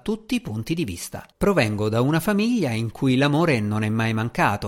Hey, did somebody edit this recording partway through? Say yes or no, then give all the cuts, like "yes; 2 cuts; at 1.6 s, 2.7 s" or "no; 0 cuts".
yes; 1 cut; at 1.3 s